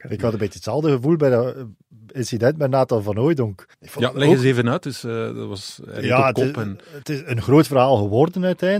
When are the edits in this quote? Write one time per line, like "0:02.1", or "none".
0:03.7